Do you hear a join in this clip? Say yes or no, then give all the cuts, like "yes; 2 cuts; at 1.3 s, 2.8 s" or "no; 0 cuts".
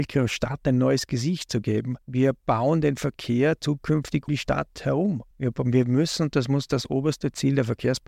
yes; 3 cuts; at 2.0 s, 4.3 s, 5.3 s